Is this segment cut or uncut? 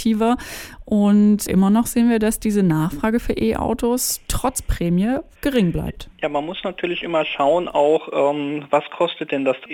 cut